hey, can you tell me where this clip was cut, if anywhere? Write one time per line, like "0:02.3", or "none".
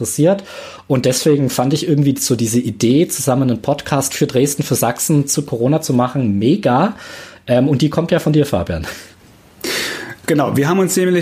none

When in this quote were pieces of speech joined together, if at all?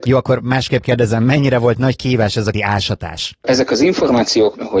0:02.5

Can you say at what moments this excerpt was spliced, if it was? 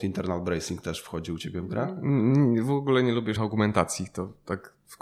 0:03.4

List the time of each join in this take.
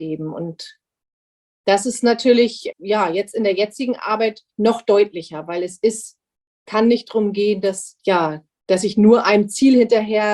0:02.7
0:04.5
0:08.0

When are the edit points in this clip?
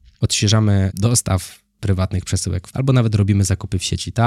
0:00.9
0:02.7

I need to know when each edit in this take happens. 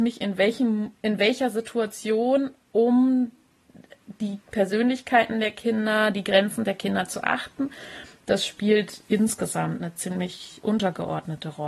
0:01.0
0:04.4

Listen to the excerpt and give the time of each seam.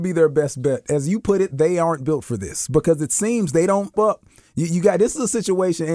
0:03.9

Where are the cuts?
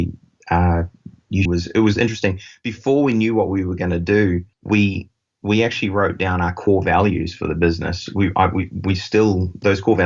0:01.5
0:04.5

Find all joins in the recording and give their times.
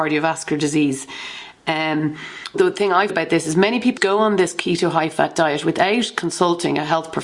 0:02.5
0:03.1
0:04.0

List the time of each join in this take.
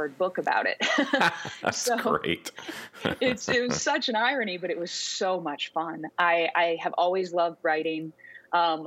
none

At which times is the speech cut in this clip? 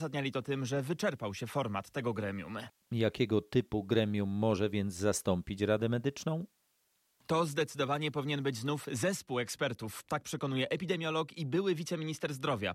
none

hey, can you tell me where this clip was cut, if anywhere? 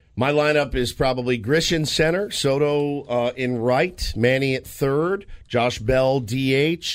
none

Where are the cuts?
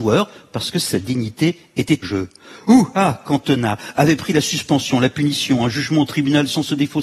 0:02.0

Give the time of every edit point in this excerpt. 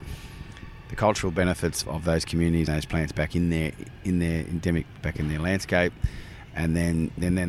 0:01.8
0:02.7
0:05.0

